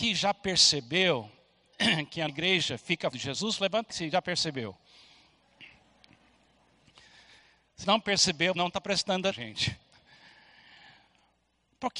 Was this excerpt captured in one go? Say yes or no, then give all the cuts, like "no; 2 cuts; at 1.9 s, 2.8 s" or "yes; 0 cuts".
no; 6 cuts; at 2.3 s, 3.1 s, 3.9 s, 7.8 s, 8.5 s, 9.3 s